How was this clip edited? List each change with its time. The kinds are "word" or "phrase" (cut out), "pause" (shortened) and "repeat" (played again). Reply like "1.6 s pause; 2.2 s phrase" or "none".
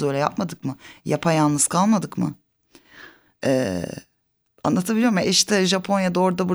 none